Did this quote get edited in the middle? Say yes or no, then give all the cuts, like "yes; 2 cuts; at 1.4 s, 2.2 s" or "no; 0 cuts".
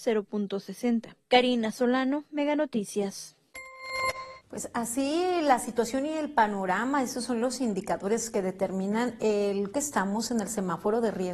yes; 2 cuts; at 4.4 s, 9.7 s